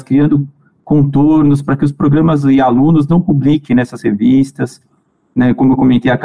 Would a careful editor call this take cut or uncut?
uncut